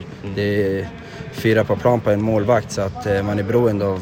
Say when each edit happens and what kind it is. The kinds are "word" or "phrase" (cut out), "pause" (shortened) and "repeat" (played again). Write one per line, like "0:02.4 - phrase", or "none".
none